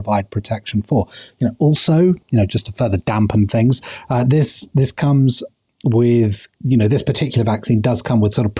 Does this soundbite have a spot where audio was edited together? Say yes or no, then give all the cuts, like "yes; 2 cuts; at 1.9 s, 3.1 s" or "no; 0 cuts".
no; 0 cuts